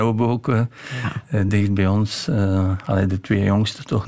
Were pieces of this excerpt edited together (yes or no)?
no